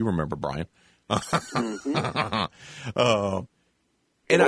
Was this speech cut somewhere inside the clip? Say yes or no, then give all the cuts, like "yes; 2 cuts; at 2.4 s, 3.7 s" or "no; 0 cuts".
no; 0 cuts